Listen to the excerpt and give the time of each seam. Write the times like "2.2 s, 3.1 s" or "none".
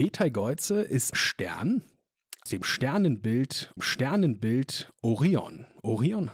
1.1 s, 2.5 s, 3.8 s